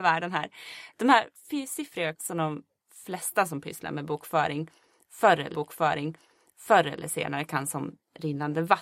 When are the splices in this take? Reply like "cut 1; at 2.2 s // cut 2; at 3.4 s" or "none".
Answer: cut 1; at 2.1 s // cut 2; at 5.5 s

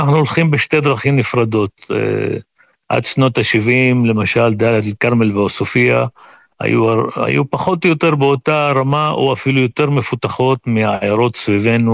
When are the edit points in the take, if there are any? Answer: none

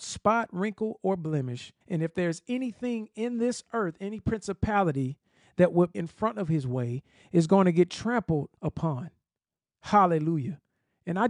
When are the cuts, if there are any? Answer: cut 1; at 1.8 s // cut 2; at 5.9 s // cut 3; at 8.6 s

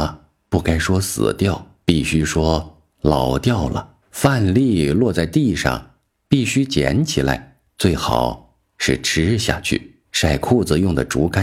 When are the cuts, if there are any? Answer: cut 1; at 1.8 s // cut 2; at 4.0 s // cut 3; at 7.7 s // cut 4; at 10.0 s

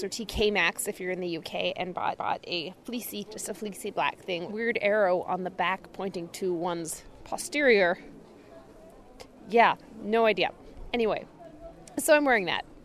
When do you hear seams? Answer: cut 1; at 2.2 s // cut 2; at 3.3 s // cut 3; at 4.5 s

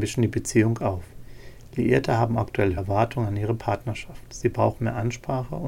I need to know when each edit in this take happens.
cut 1; at 2.8 s

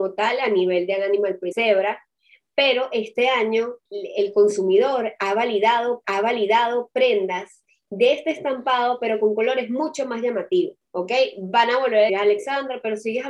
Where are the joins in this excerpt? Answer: cut 1; at 1.5 s // cut 2; at 3.9 s // cut 3; at 6.0 s // cut 4; at 10.8 s // cut 5; at 12.1 s

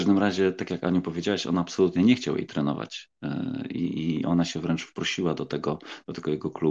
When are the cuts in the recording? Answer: none

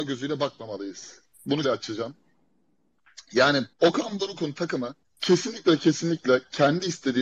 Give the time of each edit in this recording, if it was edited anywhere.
cut 1; at 1.6 s // cut 2; at 3.7 s // cut 3; at 5.0 s

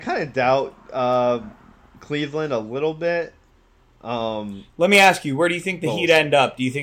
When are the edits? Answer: none

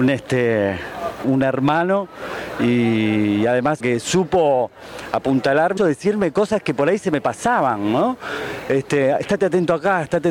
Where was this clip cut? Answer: cut 1; at 1.2 s // cut 2; at 3.8 s // cut 3; at 5.8 s

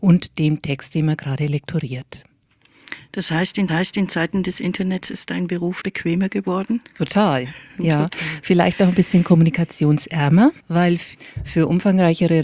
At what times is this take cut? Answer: cut 1; at 3.7 s // cut 2; at 5.8 s // cut 3; at 10.6 s

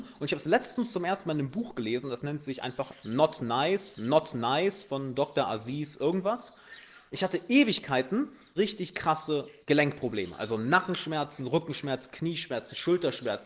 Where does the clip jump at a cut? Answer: cut 1; at 3.9 s // cut 2; at 8.6 s // cut 3; at 9.6 s

